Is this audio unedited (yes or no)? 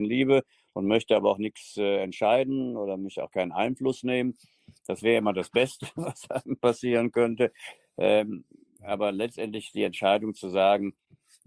yes